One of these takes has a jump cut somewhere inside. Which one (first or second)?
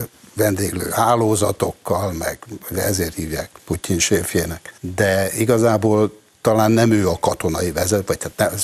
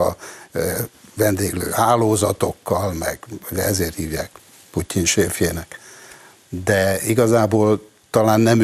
first